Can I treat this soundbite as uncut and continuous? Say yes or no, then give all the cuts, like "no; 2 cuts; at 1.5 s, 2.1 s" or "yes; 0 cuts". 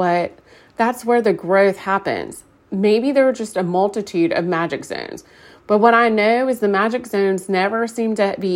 yes; 0 cuts